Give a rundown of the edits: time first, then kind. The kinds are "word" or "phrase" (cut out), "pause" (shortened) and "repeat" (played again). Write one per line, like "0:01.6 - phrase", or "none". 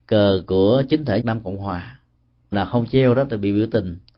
0:01.2 - word
0:02.5 - word